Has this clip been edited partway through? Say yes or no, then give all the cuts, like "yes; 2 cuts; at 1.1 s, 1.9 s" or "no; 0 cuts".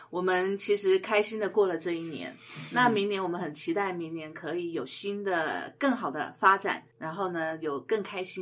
yes; 1 cut; at 6.9 s